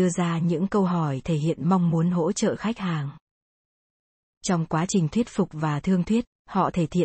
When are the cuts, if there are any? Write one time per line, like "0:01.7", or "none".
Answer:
none